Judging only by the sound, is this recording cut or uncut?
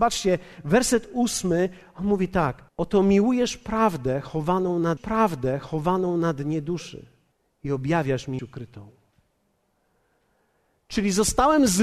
cut